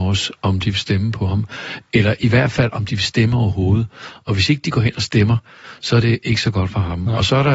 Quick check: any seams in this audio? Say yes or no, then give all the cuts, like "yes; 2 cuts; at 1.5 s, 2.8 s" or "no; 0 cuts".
no; 0 cuts